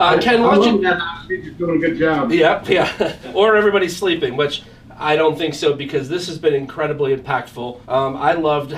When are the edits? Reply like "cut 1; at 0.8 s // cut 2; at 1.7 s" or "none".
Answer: cut 1; at 7.8 s

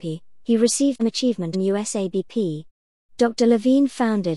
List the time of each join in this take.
cut 1; at 1.0 s // cut 2; at 1.5 s

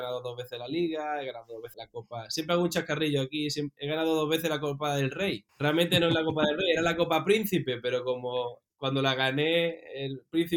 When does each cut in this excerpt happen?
cut 1; at 1.7 s // cut 2; at 5.5 s

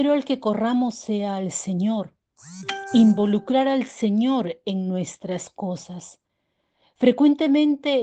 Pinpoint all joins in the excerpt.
none

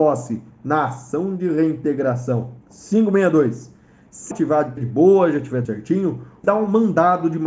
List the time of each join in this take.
cut 1; at 2.6 s // cut 2; at 4.3 s // cut 3; at 4.8 s // cut 4; at 5.6 s // cut 5; at 6.4 s

